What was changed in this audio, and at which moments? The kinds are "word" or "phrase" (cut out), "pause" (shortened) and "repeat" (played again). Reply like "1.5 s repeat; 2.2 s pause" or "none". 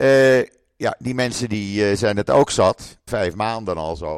3.1 s word